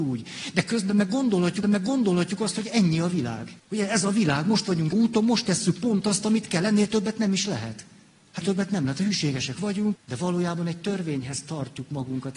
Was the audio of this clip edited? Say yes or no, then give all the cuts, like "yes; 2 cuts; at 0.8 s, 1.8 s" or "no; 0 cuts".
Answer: yes; 5 cuts; at 1.6 s, 3.6 s, 4.9 s, 8.4 s, 10.0 s